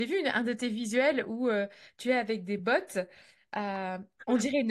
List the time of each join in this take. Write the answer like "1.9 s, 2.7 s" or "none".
none